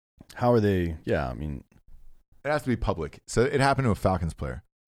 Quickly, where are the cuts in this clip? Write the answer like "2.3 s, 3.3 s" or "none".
none

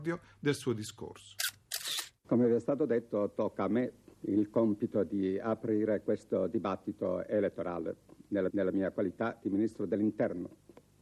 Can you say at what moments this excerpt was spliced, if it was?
4.1 s, 8.5 s

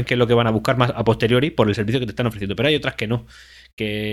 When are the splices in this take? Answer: none

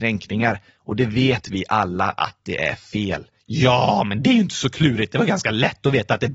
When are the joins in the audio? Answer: none

